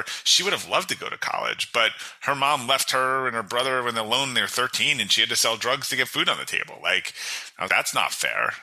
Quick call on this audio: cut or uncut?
cut